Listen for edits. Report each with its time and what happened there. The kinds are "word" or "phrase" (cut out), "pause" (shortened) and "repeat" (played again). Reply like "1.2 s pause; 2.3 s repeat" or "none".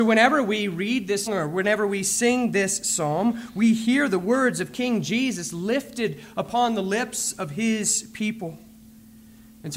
1.3 s word